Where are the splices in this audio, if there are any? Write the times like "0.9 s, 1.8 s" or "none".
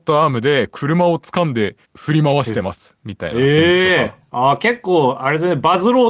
1.8 s